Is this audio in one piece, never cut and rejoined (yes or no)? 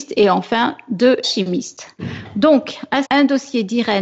no